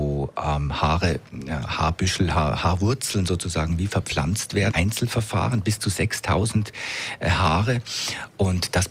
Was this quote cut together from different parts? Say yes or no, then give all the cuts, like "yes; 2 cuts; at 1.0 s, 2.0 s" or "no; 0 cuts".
yes; 1 cut; at 4.7 s